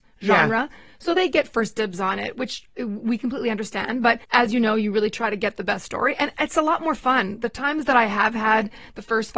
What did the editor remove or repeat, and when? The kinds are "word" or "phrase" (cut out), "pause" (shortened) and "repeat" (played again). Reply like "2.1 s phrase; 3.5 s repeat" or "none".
4.2 s pause